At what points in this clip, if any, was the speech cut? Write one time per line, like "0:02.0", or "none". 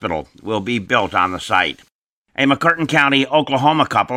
none

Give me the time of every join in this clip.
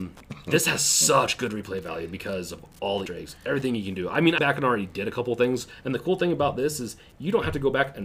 0:03.1
0:04.4

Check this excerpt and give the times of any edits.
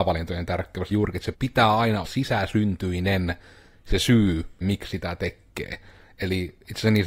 0:00.9
0:01.3
0:02.0
0:04.6

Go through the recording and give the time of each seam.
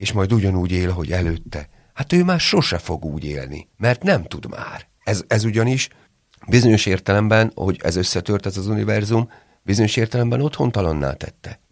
none

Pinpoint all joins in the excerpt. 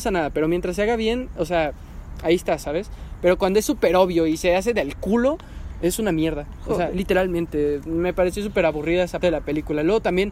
0:06.9
0:09.2

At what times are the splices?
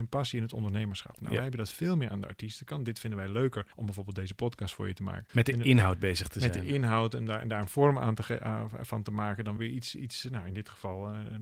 0:03.7
0:05.3
0:09.6

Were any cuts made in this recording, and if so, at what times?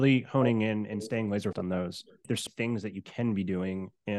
0:01.5
0:02.5

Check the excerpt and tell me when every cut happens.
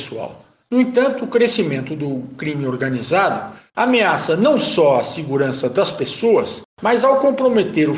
none

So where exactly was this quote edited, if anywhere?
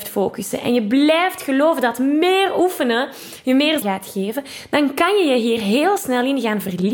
0:03.8

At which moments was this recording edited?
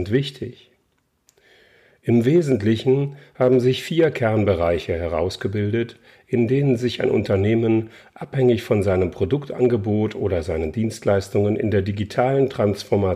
none

